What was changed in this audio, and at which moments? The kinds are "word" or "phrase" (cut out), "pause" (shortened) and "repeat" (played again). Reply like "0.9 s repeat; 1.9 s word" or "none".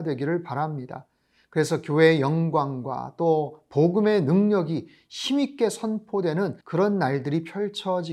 6.6 s pause